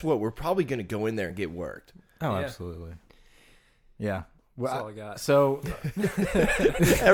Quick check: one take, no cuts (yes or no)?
yes